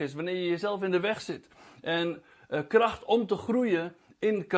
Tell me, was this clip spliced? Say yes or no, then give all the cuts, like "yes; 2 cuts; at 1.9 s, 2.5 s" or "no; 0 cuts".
no; 0 cuts